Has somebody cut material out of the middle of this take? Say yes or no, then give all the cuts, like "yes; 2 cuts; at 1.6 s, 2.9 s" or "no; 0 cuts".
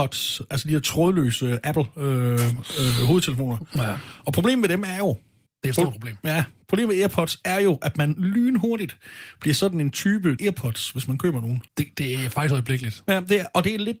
yes; 3 cuts; at 5.5 s, 10.4 s, 11.7 s